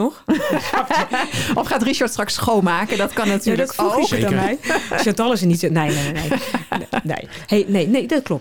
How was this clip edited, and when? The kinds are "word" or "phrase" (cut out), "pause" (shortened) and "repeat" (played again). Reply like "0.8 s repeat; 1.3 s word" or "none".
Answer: none